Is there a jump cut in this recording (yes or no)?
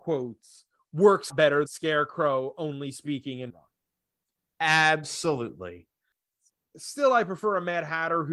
yes